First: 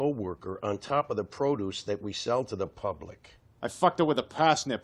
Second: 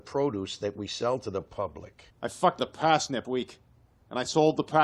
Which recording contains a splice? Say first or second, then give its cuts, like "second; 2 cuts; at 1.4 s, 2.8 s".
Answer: second; 3 cuts; at 2.1 s, 2.6 s, 3.2 s